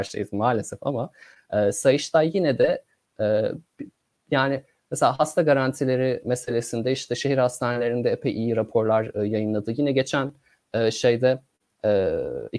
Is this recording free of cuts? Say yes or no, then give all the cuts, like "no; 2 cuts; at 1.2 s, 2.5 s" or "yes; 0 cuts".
yes; 0 cuts